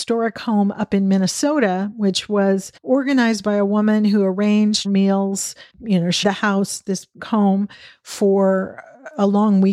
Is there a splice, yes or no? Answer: yes